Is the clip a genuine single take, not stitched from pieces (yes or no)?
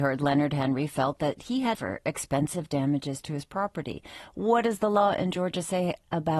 no